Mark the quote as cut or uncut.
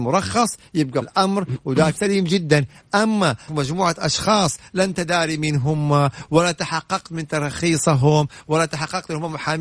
cut